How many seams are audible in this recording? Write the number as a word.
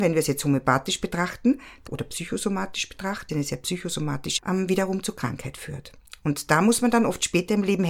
three